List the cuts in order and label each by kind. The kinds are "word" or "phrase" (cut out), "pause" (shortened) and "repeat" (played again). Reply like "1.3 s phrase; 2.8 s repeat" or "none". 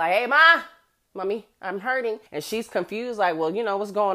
2.3 s pause